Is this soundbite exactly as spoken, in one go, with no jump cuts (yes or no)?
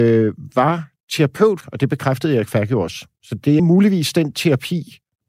no